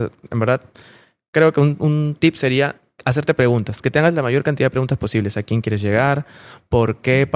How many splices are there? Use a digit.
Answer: 0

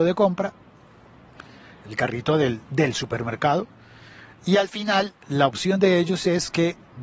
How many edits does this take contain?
1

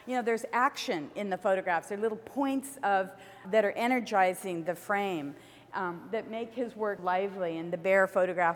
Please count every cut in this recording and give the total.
2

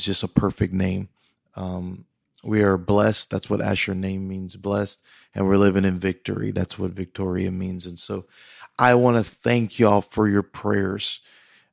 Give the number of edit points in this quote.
0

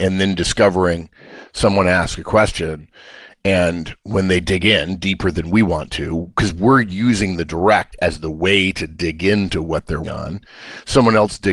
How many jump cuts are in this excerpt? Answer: 1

